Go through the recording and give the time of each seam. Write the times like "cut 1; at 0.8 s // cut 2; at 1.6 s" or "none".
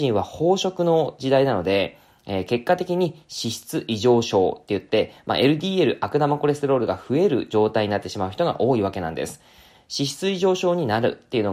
none